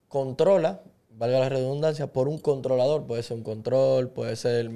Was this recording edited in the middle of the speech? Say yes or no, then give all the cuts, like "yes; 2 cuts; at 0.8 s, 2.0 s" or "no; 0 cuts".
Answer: no; 0 cuts